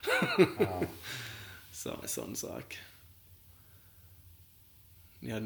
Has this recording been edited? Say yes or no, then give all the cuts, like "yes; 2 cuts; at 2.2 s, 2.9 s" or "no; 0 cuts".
yes; 1 cut; at 2.0 s